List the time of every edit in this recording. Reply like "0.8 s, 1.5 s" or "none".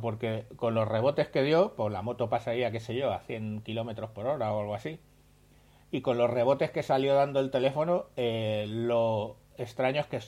none